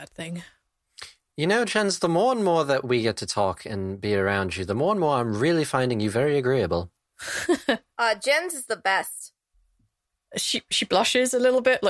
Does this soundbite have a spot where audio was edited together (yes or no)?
no